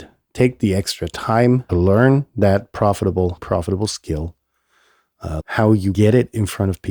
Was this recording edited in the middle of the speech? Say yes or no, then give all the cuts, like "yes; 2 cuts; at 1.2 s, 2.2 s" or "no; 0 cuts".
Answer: yes; 4 cuts; at 1.7 s, 3.4 s, 5.4 s, 5.9 s